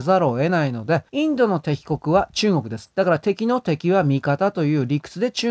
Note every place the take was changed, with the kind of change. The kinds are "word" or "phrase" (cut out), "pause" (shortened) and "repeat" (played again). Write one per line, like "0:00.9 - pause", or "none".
0:01.1 - pause